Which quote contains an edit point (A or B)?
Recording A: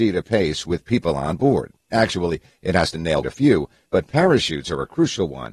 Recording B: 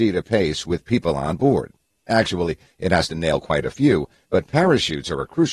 A